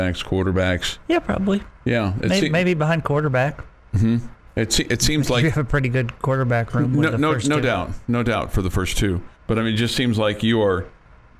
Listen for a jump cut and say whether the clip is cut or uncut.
cut